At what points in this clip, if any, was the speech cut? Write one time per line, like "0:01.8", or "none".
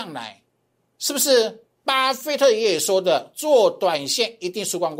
none